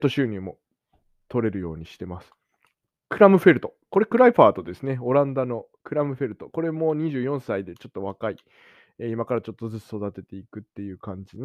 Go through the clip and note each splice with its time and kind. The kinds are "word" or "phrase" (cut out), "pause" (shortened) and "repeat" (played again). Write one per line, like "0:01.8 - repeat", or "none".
none